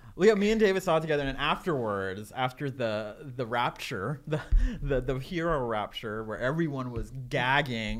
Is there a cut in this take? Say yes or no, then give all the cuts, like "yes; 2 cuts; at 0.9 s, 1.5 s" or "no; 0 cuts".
no; 0 cuts